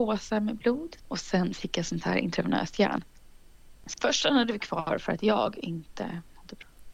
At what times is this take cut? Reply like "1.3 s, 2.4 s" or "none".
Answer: 1.0 s, 3.9 s